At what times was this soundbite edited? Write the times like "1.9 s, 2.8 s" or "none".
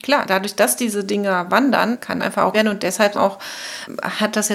2.2 s, 2.5 s, 3.1 s